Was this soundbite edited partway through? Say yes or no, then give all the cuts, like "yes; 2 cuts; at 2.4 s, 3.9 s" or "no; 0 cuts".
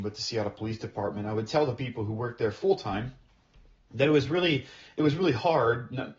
no; 0 cuts